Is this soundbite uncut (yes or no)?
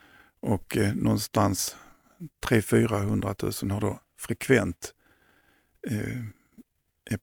yes